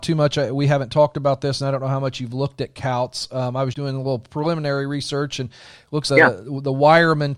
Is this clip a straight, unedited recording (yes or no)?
no